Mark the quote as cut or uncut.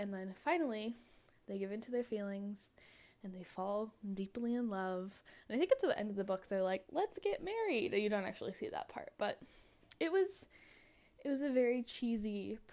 uncut